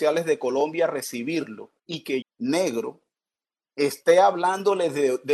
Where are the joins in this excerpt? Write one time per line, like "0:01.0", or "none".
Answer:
0:01.8
0:02.2